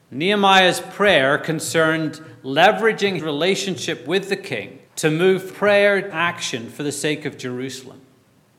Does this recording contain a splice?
yes; 4 cuts; at 3.2 s, 4.9 s, 5.5 s, 6.1 s

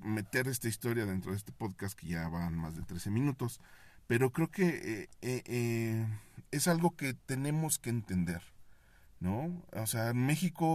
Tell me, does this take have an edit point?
no; 0 cuts

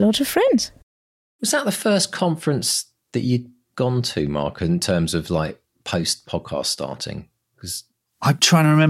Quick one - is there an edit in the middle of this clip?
no; 0 cuts

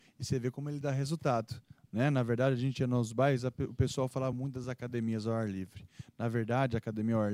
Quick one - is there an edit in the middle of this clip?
no; 0 cuts

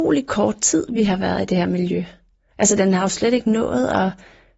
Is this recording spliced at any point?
no; 0 cuts

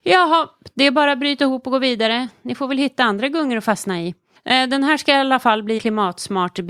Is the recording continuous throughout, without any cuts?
no; 2 cuts; at 4.4 s, 5.8 s

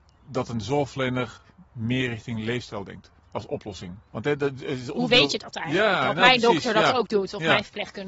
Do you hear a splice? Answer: yes; 2 cuts; at 1.7 s, 3.2 s

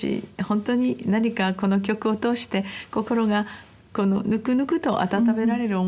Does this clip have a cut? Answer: no; 0 cuts

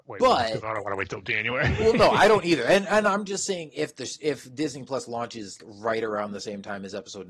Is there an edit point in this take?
yes; 1 cut; at 5.6 s

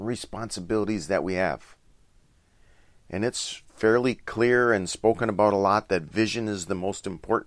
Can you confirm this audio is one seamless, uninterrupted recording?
yes; 0 cuts

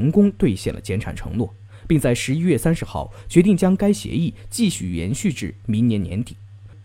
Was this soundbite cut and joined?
no; 0 cuts

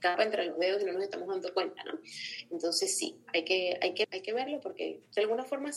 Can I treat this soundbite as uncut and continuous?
no; 1 cut; at 4.0 s

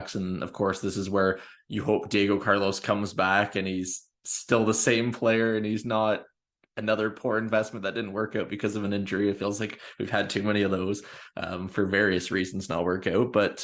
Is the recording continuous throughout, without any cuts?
yes; 0 cuts

